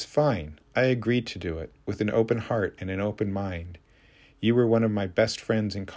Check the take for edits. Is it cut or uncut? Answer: uncut